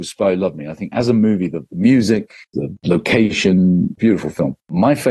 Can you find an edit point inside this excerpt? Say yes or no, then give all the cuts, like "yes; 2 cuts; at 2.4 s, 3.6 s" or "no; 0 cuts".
yes; 1 cut; at 4.0 s